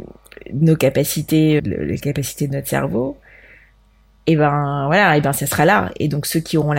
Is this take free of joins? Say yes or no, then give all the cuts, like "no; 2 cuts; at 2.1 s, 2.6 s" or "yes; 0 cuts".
no; 1 cut; at 1.6 s